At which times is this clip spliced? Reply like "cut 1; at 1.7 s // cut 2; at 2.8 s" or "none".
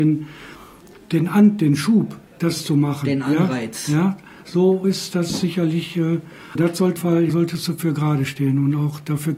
cut 1; at 2.3 s // cut 2; at 4.8 s // cut 3; at 6.6 s // cut 4; at 7.0 s // cut 5; at 7.3 s